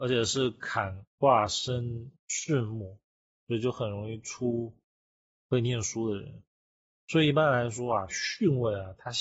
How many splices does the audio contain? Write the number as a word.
one